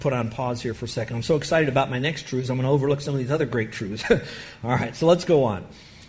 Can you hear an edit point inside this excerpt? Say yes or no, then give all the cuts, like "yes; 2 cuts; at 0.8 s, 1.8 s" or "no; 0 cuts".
no; 0 cuts